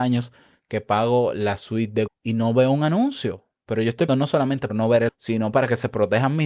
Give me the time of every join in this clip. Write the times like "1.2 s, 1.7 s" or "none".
2.1 s, 4.1 s, 4.7 s, 5.1 s